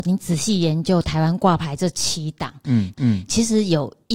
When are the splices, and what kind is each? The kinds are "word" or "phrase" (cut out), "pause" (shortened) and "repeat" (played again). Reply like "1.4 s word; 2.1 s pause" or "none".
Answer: 2.9 s repeat

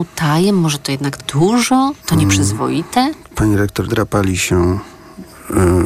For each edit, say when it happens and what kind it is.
1.2 s phrase; 2.0 s pause; 3.9 s word

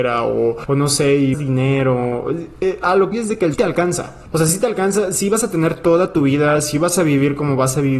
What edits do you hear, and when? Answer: 1.3 s word; 3.1 s word; 3.5 s phrase

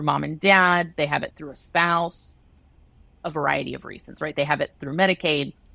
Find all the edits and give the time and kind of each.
none

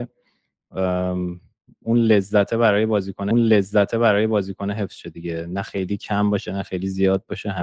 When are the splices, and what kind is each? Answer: 3.3 s repeat

